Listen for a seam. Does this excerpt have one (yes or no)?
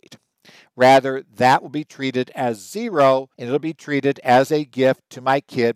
yes